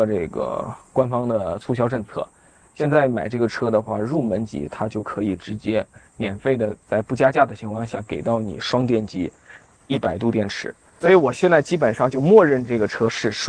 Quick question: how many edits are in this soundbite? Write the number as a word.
one